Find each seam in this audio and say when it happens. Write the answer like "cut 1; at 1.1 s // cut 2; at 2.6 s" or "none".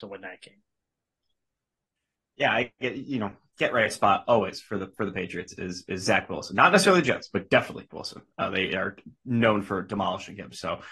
cut 1; at 7.9 s

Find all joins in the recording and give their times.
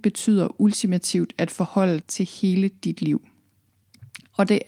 cut 1; at 2.0 s

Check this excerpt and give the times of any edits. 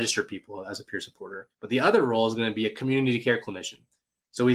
cut 1; at 1.5 s

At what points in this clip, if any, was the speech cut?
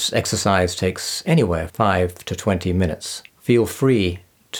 cut 1; at 1.7 s // cut 2; at 3.3 s

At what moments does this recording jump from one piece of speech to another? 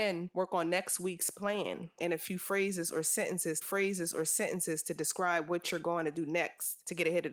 cut 1; at 2.0 s // cut 2; at 3.6 s

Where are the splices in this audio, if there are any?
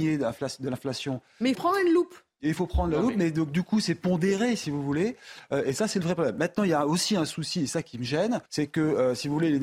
cut 1; at 1.5 s // cut 2; at 8.5 s

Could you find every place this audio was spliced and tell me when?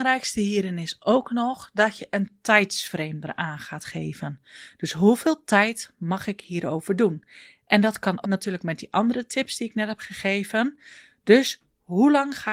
cut 1; at 8.2 s

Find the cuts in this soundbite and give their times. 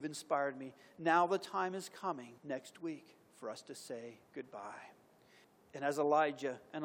cut 1; at 2.4 s // cut 2; at 4.2 s

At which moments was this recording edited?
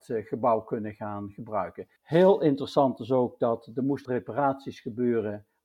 cut 1; at 2.0 s // cut 2; at 4.1 s

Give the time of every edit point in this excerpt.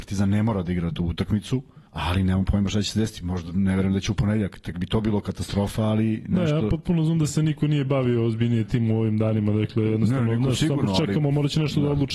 cut 1; at 1.9 s

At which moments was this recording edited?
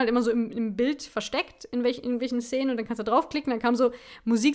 none

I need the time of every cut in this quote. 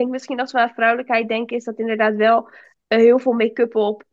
none

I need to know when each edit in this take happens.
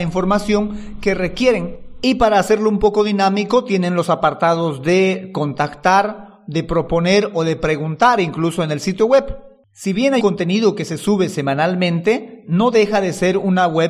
cut 1; at 10.2 s

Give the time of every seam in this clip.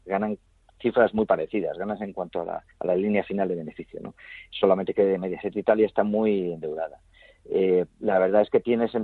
cut 1; at 2.7 s

